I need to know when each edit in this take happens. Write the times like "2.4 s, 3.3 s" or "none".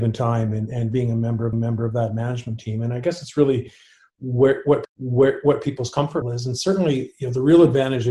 1.5 s, 4.8 s, 6.2 s